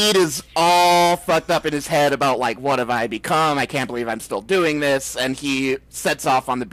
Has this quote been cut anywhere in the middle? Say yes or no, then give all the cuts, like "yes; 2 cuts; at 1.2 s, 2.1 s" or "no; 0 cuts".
no; 0 cuts